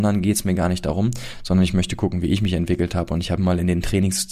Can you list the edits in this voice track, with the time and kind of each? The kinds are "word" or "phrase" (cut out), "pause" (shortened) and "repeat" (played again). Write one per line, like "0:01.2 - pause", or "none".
0:03.4 - word